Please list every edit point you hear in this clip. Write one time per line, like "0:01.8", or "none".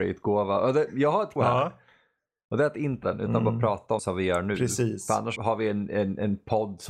0:01.4
0:03.0
0:04.0
0:05.4

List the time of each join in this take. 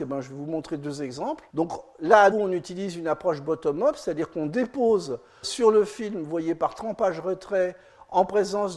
0:01.5
0:02.3
0:05.4

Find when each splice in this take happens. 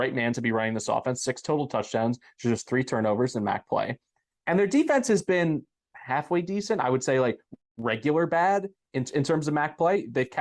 none

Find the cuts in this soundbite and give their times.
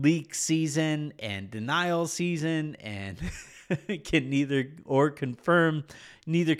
none

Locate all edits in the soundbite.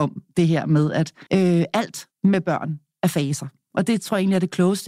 0:01.3
0:02.1

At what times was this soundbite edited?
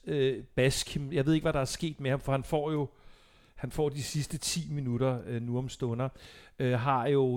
none

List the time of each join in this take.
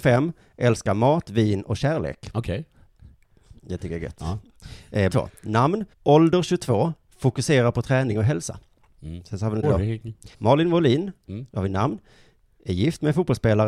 0:05.1
0:05.9
0:09.6
0:10.3

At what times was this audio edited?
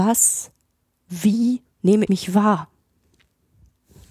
0:02.1

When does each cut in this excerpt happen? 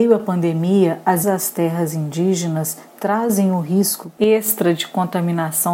0:01.2

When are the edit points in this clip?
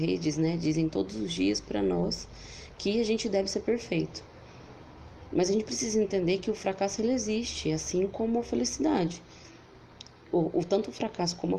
none

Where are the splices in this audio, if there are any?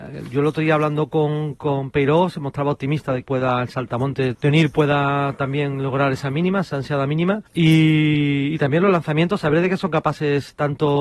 0:03.2
0:04.3
0:07.5

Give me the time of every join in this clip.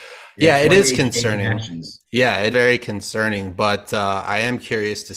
0:02.0
0:02.5

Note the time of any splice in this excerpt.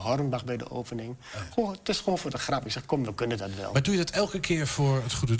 none

